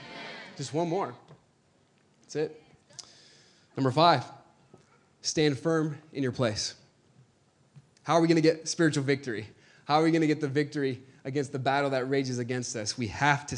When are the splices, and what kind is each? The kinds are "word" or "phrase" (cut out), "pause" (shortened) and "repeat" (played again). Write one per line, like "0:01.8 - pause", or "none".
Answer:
none